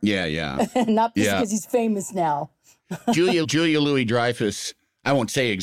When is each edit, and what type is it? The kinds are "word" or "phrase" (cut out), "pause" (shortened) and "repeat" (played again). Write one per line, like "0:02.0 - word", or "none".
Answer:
0:03.4 - word